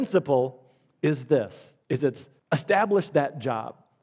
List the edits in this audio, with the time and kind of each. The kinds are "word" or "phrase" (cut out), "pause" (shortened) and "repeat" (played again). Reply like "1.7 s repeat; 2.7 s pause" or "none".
1.8 s pause; 2.4 s pause